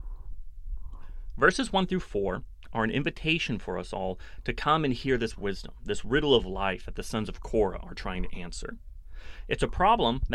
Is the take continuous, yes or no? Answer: yes